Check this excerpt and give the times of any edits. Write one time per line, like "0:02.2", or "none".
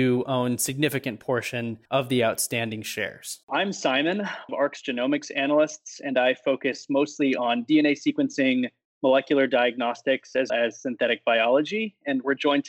0:01.9
0:03.4
0:04.5
0:10.5